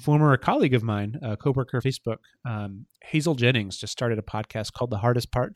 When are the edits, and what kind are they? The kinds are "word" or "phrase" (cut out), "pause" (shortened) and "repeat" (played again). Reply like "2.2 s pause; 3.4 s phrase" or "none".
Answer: 1.8 s word